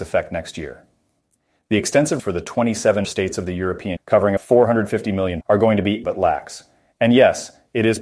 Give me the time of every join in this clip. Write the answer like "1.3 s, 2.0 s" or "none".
2.2 s, 3.0 s, 4.0 s, 4.4 s, 5.4 s, 6.0 s